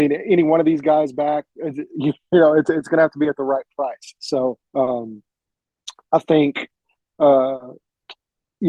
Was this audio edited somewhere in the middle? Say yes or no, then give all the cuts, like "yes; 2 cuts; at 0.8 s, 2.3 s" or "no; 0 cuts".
yes; 1 cut; at 4.6 s